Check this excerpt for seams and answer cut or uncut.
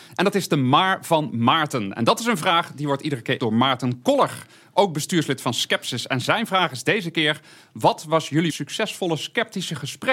cut